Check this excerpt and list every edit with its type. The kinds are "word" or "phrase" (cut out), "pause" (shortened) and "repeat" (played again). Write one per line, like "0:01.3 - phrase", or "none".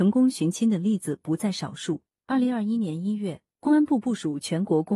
none